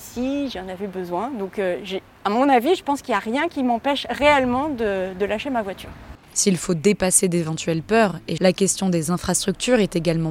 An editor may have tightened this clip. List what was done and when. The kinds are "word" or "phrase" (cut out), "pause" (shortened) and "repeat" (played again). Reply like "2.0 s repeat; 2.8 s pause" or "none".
6.2 s pause; 8.4 s phrase